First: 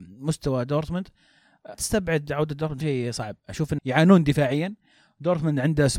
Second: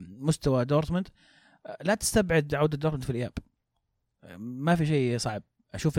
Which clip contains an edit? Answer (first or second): first